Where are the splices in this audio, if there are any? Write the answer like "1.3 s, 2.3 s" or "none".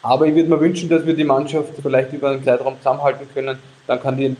1.8 s, 2.4 s